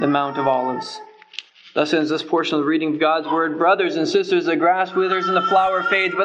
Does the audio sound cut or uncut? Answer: uncut